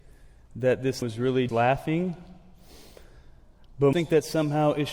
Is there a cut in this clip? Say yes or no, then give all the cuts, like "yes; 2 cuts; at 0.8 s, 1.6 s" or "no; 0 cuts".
yes; 3 cuts; at 1.0 s, 1.5 s, 3.9 s